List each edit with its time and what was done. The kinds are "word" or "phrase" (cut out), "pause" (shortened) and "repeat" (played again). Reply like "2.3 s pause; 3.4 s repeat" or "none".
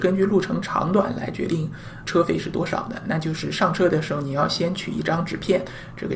2.0 s word